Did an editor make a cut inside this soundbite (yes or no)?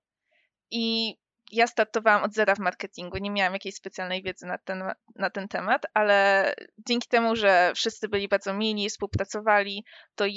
no